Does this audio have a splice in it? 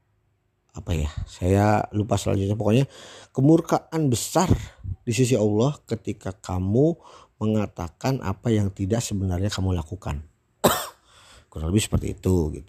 no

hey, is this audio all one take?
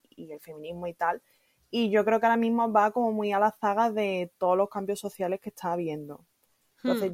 yes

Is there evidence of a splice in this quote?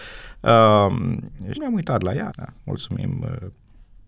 yes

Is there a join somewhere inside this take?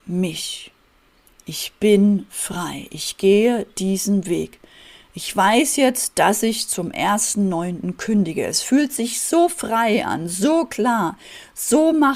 no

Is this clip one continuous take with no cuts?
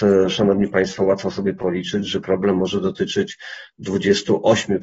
yes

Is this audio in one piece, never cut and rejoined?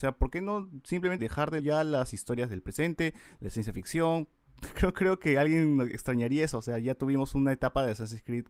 no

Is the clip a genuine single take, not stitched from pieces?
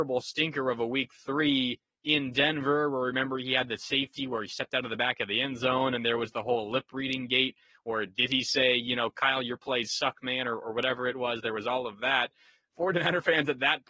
yes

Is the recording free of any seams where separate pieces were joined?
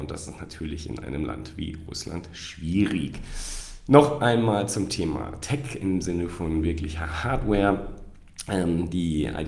yes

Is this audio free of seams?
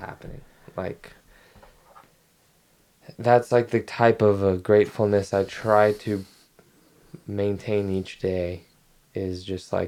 yes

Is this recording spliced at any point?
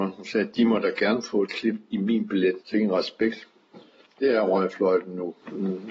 yes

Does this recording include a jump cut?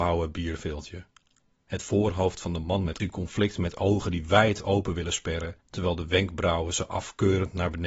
yes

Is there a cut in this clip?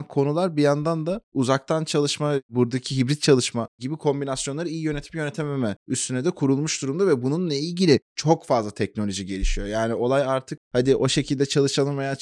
no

